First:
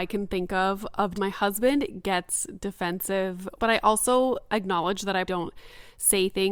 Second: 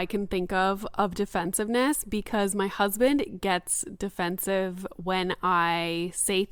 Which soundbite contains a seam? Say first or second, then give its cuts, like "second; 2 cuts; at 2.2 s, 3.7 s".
first; 3 cuts; at 1.1 s, 3.6 s, 5.3 s